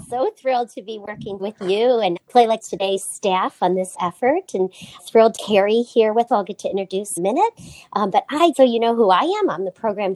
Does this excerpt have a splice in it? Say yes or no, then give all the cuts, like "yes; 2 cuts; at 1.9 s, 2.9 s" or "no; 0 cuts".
yes; 9 cuts; at 1.4 s, 2.2 s, 2.6 s, 3.9 s, 5.0 s, 5.4 s, 6.3 s, 7.2 s, 8.5 s